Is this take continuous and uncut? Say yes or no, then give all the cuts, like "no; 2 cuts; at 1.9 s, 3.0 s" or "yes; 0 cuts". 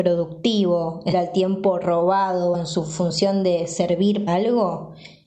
no; 3 cuts; at 1.1 s, 2.5 s, 4.3 s